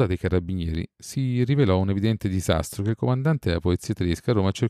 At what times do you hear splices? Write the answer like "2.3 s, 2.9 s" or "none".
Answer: none